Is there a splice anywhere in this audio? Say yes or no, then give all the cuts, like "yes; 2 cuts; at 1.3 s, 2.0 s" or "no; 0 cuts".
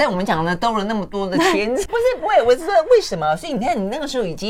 yes; 2 cuts; at 1.9 s, 2.2 s